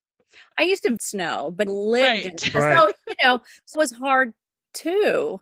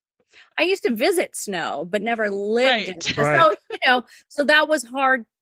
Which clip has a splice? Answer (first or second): first